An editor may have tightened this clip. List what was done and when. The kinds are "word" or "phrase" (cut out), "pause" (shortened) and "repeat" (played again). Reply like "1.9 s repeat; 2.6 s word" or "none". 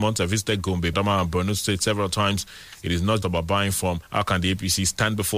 0.9 s word; 3.2 s word; 4.0 s pause